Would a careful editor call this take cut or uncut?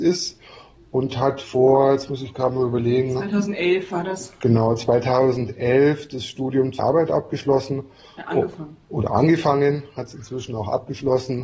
cut